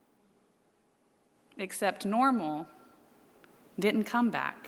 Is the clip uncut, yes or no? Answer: yes